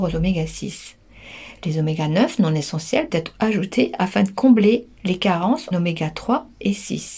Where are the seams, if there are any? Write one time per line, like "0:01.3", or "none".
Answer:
0:03.1
0:05.7

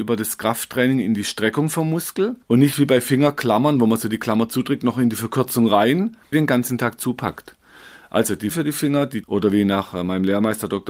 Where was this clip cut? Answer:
0:02.4
0:06.3
0:08.5
0:09.2

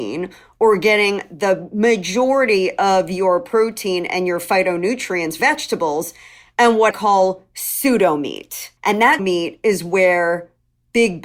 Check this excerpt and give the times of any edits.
0:05.4
0:06.9
0:08.8
0:09.2

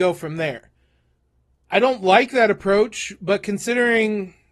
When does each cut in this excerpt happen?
none

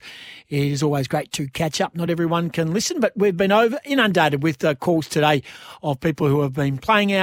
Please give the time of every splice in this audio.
none

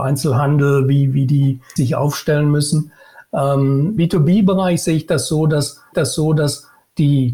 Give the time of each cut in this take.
0:01.8
0:04.0
0:05.9

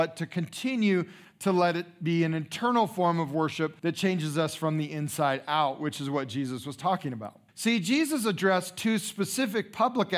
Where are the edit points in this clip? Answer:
0:03.8
0:07.5

